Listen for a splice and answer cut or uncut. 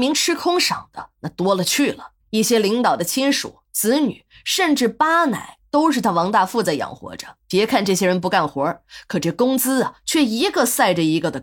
cut